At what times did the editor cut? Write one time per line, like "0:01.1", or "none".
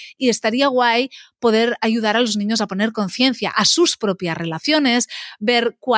none